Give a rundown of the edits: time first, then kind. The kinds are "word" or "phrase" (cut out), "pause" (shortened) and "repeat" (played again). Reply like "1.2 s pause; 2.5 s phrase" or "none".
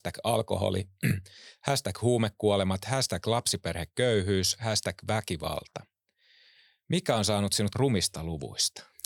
7.7 s word